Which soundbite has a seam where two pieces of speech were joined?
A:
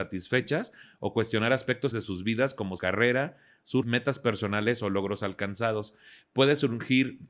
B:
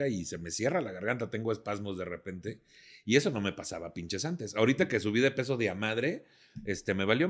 A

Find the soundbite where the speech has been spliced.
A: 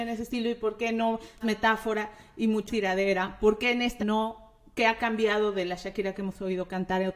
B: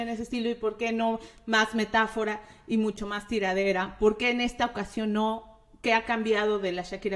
A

